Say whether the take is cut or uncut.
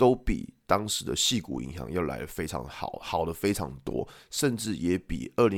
uncut